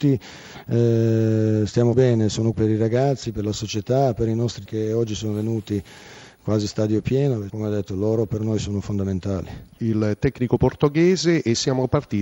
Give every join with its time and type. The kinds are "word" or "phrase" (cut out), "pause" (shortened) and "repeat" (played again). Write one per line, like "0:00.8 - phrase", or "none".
0:01.9 - word
0:02.5 - word
0:04.7 - word
0:07.5 - word